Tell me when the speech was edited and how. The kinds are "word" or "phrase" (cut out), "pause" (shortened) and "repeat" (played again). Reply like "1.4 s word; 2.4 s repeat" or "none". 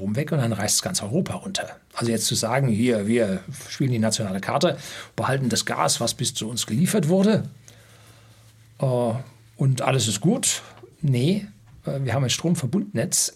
none